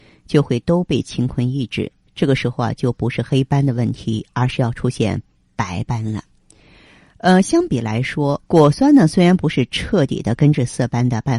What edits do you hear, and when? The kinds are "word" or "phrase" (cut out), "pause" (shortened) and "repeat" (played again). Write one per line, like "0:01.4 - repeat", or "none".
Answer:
0:08.5 - pause